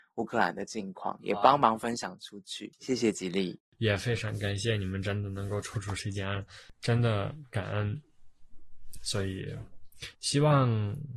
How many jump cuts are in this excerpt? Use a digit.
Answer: 1